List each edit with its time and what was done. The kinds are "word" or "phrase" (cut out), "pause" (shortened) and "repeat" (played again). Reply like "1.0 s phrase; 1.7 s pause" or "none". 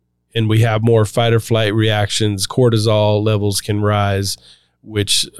none